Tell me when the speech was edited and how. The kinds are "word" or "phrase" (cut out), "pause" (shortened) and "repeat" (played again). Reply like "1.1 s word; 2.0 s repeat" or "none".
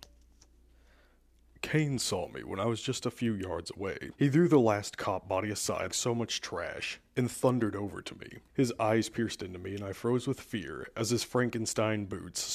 4.1 s pause; 5.9 s word; 8.5 s pause